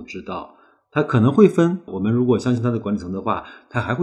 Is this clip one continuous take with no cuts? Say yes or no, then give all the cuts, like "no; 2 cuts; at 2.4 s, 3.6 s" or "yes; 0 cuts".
no; 1 cut; at 1.9 s